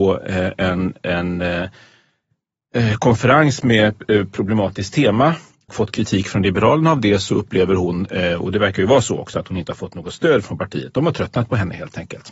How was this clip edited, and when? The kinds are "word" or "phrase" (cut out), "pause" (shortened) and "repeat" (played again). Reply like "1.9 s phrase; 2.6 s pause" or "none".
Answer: 5.7 s phrase